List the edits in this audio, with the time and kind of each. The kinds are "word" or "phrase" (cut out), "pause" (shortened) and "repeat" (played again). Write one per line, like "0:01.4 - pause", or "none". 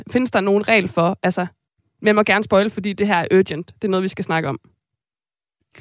0:01.7 - pause